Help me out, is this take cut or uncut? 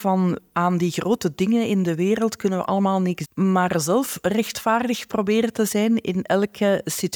cut